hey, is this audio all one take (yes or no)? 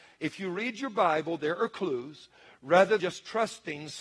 no